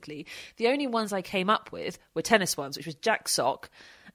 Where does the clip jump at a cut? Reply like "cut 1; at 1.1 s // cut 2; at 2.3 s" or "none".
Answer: none